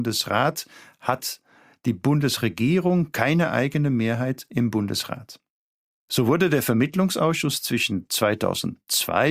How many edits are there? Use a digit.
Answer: 0